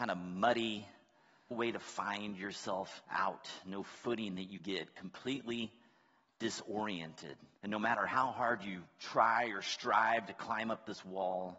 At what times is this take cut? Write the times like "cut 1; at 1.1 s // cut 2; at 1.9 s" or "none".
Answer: cut 1; at 1.5 s // cut 2; at 3.0 s // cut 3; at 4.6 s // cut 4; at 7.5 s

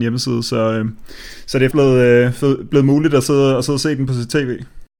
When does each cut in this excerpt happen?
cut 1; at 1.7 s

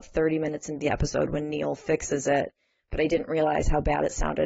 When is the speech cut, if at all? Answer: none

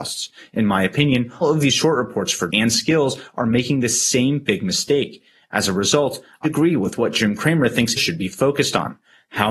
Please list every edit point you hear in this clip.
cut 1; at 1.4 s // cut 2; at 2.5 s // cut 3; at 6.4 s // cut 4; at 8.0 s

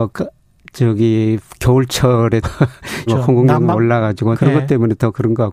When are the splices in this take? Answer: cut 1; at 2.4 s // cut 2; at 3.1 s // cut 3; at 4.3 s

